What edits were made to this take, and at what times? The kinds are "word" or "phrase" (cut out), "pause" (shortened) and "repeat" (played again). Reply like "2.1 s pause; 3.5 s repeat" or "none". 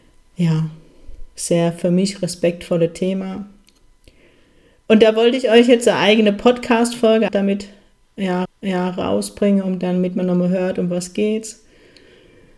7.3 s word; 8.5 s repeat